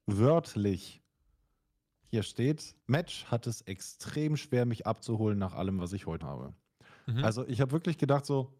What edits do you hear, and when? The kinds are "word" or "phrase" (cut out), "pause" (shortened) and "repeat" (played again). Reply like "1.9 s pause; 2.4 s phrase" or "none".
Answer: 2.8 s pause; 6.2 s word